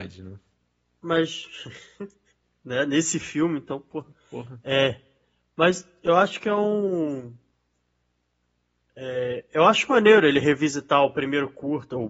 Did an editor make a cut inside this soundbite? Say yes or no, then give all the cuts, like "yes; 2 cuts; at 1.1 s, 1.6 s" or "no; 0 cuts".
no; 0 cuts